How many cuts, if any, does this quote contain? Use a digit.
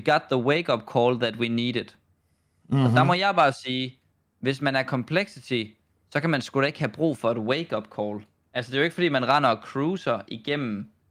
0